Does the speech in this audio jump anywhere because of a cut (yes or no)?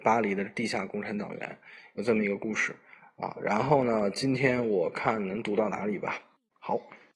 no